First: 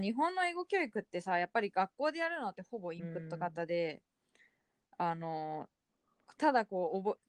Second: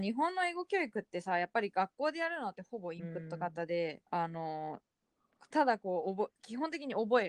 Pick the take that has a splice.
second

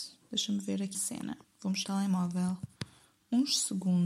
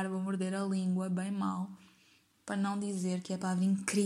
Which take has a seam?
first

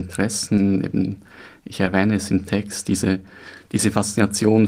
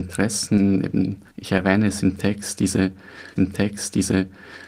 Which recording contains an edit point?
second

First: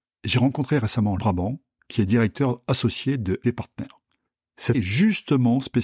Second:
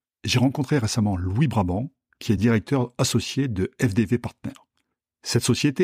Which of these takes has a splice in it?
first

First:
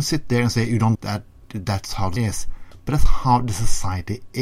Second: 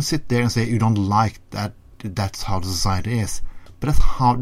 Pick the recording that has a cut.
first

